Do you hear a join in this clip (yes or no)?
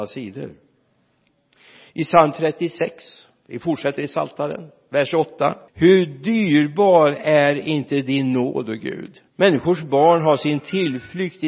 yes